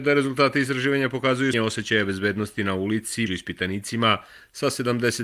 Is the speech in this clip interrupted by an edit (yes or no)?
yes